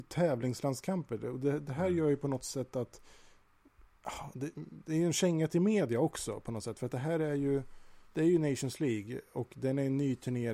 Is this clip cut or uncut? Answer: cut